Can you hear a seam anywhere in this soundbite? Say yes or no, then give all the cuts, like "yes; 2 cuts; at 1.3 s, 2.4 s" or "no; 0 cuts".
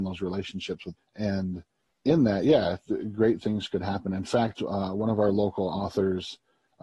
yes; 1 cut; at 1.0 s